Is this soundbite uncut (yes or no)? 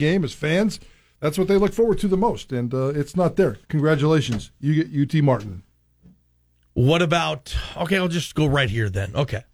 no